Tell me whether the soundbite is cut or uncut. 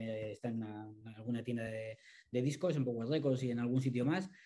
uncut